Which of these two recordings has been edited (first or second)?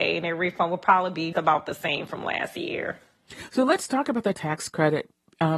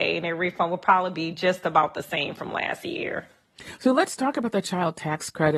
first